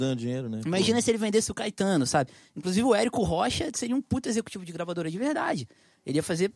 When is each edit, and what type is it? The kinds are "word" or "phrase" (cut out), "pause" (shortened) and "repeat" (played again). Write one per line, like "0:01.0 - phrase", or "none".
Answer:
none